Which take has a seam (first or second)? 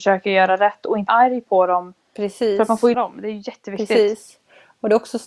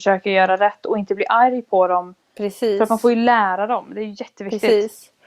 first